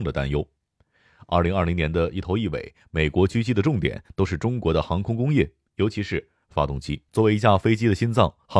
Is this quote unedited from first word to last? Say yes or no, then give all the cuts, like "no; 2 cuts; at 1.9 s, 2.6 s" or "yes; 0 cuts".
no; 1 cut; at 7.1 s